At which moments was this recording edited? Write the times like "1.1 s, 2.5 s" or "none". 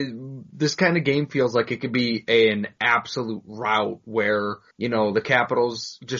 4.7 s